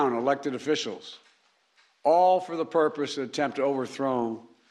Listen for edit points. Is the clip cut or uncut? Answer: uncut